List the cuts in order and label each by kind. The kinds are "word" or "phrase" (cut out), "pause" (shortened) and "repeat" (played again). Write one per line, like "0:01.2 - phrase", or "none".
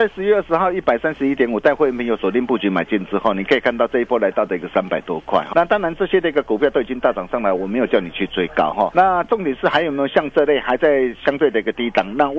0:05.5 - word
0:08.9 - word